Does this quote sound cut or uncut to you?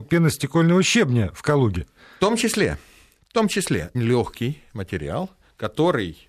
cut